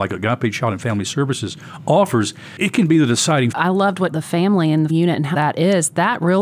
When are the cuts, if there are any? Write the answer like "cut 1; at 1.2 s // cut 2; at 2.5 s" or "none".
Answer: cut 1; at 3.5 s // cut 2; at 4.1 s // cut 3; at 4.9 s // cut 4; at 5.3 s